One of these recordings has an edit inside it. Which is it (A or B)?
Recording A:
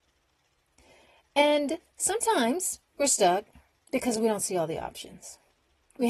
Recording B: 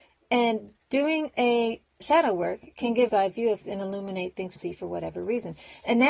B